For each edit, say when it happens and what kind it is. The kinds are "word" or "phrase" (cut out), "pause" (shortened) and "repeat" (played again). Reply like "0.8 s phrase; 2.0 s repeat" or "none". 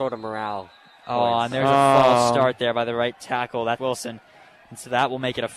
3.8 s word

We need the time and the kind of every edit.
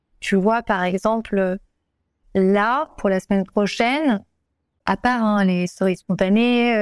none

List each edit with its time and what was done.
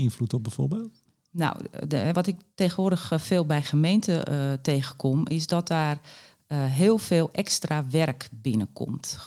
2.1 s word

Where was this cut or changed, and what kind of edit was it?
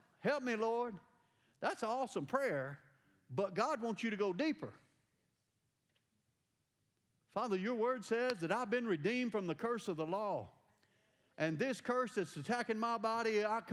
none

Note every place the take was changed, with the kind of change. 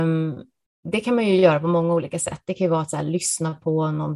none

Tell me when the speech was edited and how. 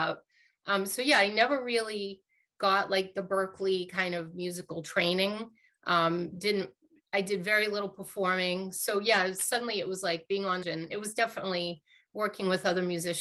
10.6 s phrase

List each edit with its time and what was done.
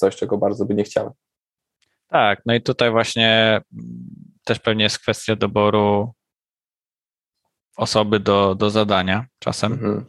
none

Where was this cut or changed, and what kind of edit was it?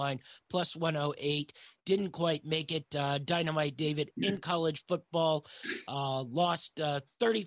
none

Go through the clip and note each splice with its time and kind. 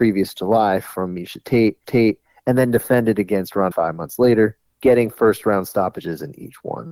1.8 s repeat; 3.7 s word

